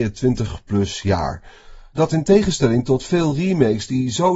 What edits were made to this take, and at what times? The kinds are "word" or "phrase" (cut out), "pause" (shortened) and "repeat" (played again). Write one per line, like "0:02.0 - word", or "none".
none

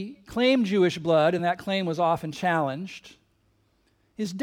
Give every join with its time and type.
none

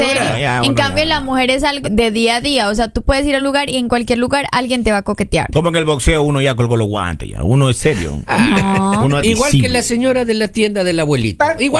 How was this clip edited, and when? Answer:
0:01.8 - word
0:03.4 - word
0:09.2 - phrase

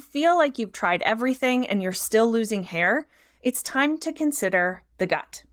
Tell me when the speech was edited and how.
none

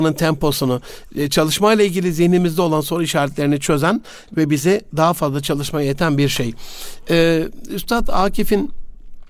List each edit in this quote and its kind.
none

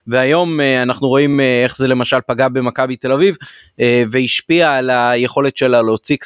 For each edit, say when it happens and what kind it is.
none

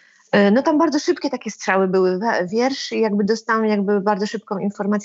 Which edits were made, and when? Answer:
none

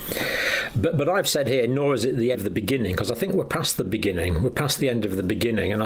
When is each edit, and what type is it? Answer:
0:02.3 - word

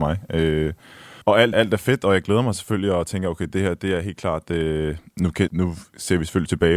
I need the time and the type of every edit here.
0:01.2 - pause
0:01.5 - word
0:05.5 - word

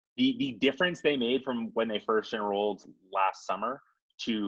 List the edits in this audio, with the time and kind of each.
none

